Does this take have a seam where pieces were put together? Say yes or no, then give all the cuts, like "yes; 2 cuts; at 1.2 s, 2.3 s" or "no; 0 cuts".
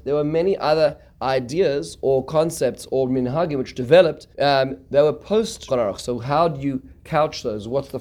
yes; 2 cuts; at 4.3 s, 5.7 s